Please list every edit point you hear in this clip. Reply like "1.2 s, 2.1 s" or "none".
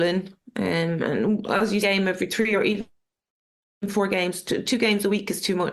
1.8 s